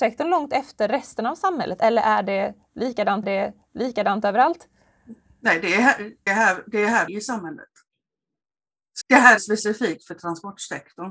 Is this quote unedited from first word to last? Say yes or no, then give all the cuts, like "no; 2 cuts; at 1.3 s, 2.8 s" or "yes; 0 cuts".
no; 5 cuts; at 3.2 s, 6.3 s, 7.1 s, 9.0 s, 9.4 s